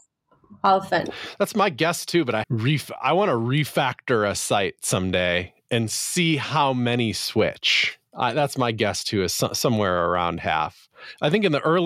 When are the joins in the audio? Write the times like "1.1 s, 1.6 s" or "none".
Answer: 2.4 s, 8.1 s